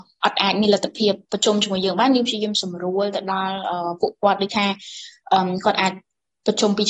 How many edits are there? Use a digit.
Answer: 1